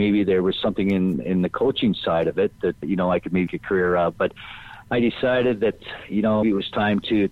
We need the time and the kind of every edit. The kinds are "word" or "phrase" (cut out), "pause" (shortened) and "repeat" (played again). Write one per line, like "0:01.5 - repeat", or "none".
0:02.8 - word
0:03.5 - word
0:06.4 - word